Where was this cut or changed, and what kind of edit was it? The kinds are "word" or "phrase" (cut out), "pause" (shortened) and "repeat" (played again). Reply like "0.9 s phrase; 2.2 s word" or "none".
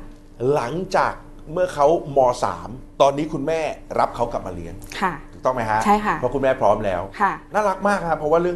2.9 s pause